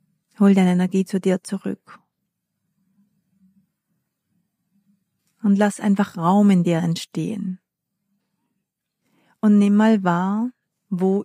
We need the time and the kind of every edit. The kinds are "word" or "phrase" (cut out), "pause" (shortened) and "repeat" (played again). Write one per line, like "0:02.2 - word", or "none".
none

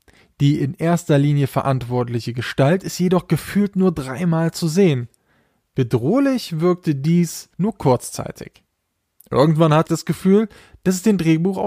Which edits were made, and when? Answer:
0:07.5 - pause
0:09.9 - word

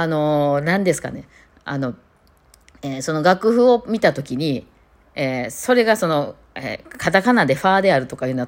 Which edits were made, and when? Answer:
none

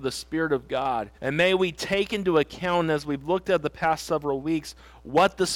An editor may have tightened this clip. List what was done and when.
0:01.2 - pause

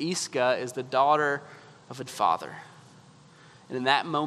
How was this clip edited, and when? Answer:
0:02.1 - word

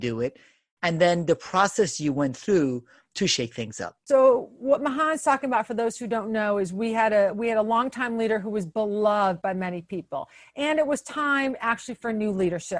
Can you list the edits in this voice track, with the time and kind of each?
0:04.0 - pause

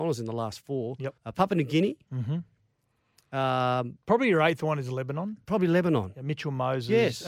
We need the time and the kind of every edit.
0:01.2 - pause
0:04.0 - pause

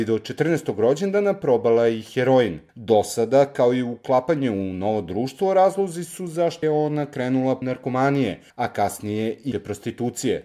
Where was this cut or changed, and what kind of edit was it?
0:02.7 - pause
0:06.6 - word
0:07.6 - word
0:08.5 - pause
0:09.5 - word

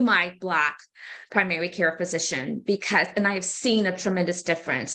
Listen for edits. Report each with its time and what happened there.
0:01.3 - word

